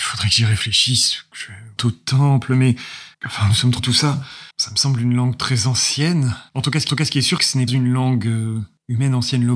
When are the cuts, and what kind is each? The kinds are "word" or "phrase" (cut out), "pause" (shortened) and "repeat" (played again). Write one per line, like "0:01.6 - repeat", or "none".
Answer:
0:01.8 - phrase
0:03.1 - pause
0:03.8 - word
0:04.5 - pause
0:06.5 - pause
0:06.9 - repeat
0:07.4 - word
0:07.7 - word